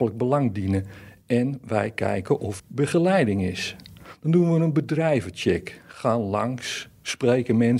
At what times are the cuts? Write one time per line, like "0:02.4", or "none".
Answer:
0:02.6